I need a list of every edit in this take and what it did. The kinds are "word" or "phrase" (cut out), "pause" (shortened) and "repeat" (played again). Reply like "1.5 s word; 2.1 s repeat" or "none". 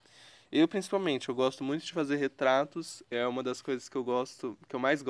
none